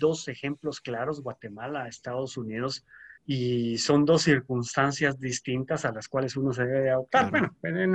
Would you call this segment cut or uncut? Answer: cut